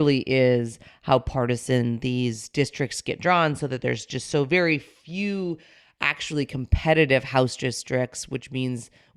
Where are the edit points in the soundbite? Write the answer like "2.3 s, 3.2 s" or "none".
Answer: none